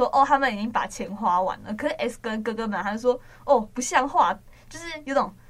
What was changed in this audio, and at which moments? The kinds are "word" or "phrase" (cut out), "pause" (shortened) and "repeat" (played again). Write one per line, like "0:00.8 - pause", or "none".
0:02.2 - word